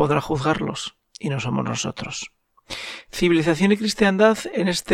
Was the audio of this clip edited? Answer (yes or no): no